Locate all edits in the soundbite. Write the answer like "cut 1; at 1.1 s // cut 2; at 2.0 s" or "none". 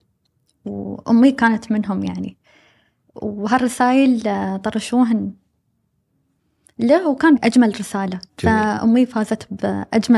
cut 1; at 7.4 s // cut 2; at 8.3 s